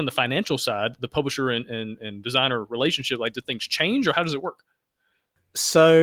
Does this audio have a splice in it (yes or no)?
no